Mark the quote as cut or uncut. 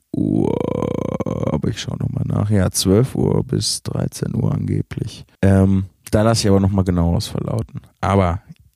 cut